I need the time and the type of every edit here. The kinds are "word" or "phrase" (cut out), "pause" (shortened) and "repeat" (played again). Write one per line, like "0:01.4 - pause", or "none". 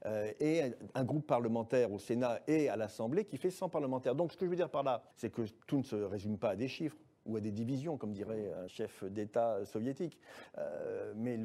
0:05.1 - pause
0:05.6 - pause
0:08.7 - word